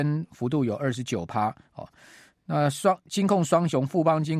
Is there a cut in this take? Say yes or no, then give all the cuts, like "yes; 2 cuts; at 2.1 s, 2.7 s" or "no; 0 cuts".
no; 0 cuts